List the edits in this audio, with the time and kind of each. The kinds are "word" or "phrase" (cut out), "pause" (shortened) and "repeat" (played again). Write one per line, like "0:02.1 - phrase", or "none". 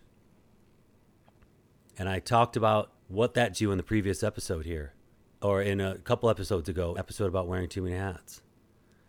0:03.0 - pause
0:03.5 - word
0:05.1 - pause
0:07.0 - phrase